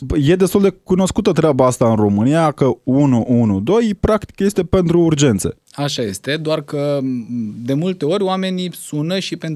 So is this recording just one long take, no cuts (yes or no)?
yes